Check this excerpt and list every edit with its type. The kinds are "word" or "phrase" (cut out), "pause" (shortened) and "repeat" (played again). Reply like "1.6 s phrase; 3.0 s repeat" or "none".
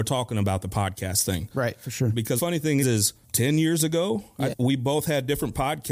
2.4 s word; 2.8 s word; 3.2 s pause; 4.5 s word

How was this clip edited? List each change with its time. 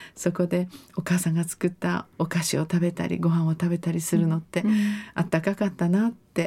2.1 s pause

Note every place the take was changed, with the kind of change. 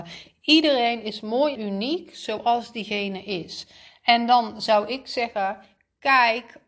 1.6 s word

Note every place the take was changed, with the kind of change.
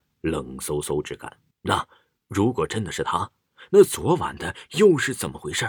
1.5 s pause

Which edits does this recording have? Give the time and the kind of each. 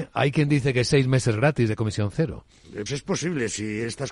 2.9 s word

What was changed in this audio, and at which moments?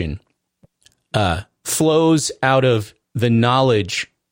none

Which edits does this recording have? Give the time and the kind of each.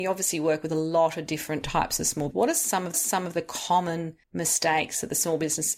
2.3 s word; 2.9 s repeat; 4.2 s pause

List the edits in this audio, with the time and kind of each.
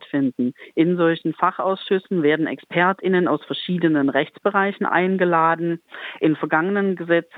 none

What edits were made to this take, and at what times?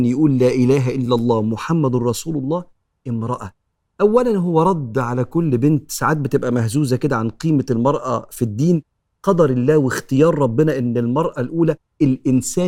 none

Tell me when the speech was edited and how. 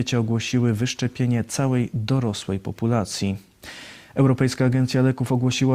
none

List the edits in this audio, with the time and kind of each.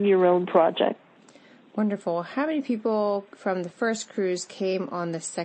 none

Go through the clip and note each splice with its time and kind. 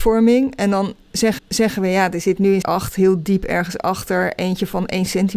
1.4 s repeat; 2.6 s word

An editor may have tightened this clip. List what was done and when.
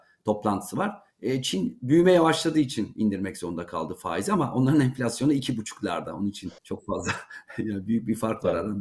1.1 s pause; 6.6 s pause

